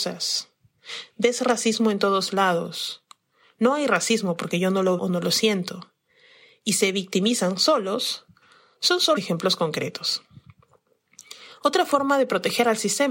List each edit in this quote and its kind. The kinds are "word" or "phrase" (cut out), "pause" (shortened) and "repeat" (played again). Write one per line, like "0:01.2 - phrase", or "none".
0:05.0 - word
0:09.2 - word